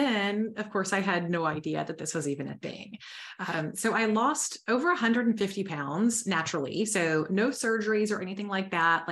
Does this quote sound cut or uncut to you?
uncut